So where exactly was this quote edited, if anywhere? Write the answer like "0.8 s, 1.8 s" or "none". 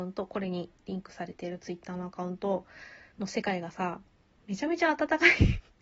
3.1 s